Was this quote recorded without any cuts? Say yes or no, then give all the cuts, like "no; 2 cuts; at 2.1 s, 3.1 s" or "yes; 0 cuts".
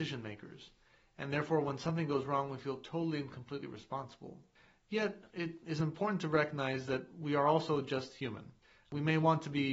yes; 0 cuts